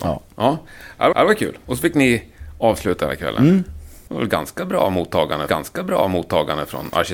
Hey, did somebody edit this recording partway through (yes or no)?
yes